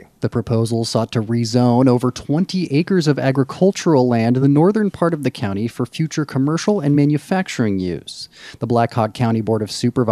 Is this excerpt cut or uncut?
uncut